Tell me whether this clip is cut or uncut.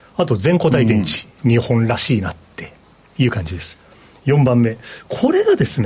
uncut